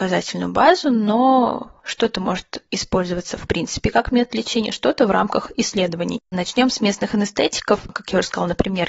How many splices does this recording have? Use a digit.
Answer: 0